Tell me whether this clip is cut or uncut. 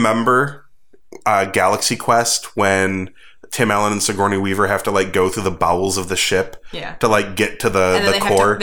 uncut